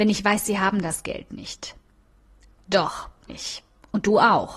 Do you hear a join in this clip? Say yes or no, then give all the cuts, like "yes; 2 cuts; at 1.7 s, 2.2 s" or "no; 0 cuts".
yes; 1 cut; at 3.3 s